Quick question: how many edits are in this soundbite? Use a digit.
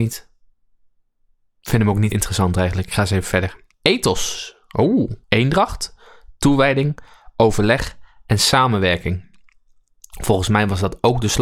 3